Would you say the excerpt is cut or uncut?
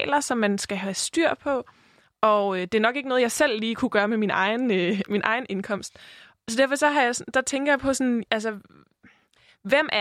uncut